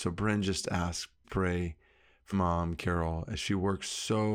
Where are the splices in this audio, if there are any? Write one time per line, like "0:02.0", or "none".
0:01.2
0:02.3